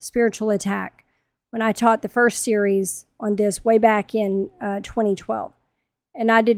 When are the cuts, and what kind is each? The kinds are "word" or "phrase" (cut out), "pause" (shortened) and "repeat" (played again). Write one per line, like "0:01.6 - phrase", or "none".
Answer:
none